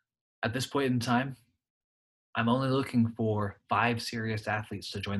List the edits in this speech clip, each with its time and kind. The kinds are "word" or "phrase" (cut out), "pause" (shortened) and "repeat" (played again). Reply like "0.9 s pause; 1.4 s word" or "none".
none